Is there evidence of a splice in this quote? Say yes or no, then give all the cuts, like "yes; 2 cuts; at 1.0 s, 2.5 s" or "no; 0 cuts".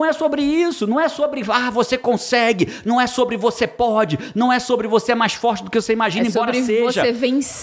no; 0 cuts